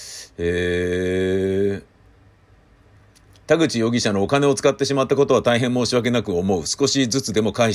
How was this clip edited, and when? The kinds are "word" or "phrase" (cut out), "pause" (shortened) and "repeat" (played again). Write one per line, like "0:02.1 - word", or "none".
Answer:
none